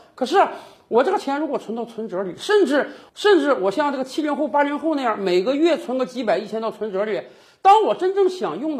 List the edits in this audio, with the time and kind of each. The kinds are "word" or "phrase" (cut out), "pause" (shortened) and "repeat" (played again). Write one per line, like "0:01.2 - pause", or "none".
none